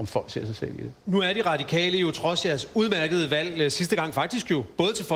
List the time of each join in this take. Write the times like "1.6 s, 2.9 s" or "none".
none